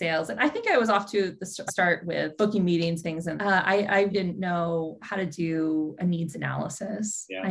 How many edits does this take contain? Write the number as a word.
five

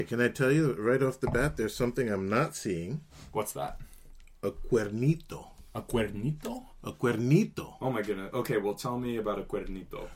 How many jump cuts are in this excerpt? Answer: zero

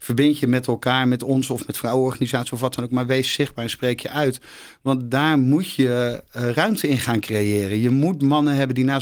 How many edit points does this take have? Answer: zero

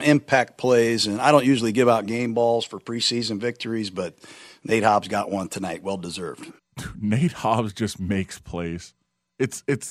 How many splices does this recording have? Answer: one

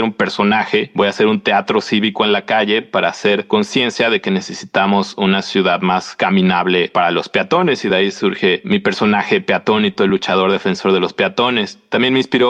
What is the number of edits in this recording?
zero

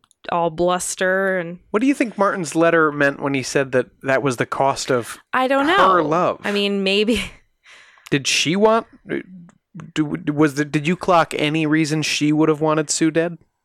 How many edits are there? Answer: zero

